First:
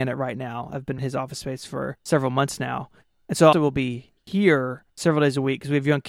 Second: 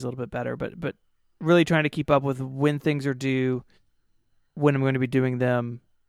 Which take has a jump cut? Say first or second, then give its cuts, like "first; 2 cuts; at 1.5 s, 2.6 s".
first; 4 cuts; at 1.0 s, 2.0 s, 3.5 s, 4.9 s